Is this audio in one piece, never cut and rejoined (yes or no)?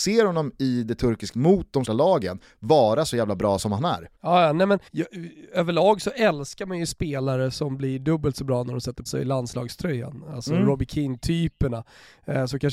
no